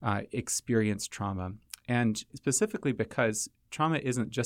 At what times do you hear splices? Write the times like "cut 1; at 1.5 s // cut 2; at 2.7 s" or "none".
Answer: cut 1; at 2.3 s